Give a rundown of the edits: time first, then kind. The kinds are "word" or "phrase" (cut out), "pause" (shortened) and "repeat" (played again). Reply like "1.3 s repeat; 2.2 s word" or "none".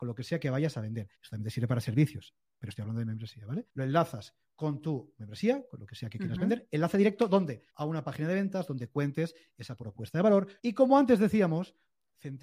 1.1 s pause; 3.7 s pause; 7.7 s pause; 10.6 s pause